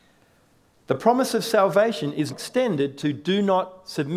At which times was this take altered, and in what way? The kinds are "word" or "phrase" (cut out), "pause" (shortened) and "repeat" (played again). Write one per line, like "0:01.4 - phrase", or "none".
0:02.3 - word
0:03.0 - word